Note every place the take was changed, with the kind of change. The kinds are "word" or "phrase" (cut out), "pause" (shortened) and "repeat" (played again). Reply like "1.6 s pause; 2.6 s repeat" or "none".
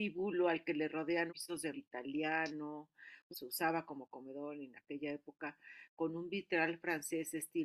1.3 s phrase; 1.7 s word; 3.3 s phrase